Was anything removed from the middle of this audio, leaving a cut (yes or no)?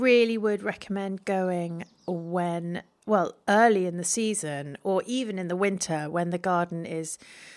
no